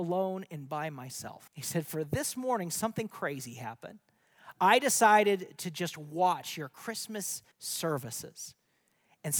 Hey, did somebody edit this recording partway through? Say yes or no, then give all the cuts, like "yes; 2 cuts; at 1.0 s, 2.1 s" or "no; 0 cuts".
yes; 2 cuts; at 1.5 s, 7.5 s